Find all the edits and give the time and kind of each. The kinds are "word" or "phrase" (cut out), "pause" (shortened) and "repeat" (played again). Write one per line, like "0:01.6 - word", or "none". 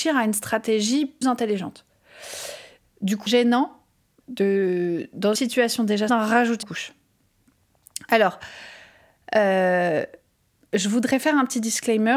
0:01.2 - word
0:03.3 - word
0:04.2 - word
0:05.3 - word
0:06.1 - word
0:06.6 - word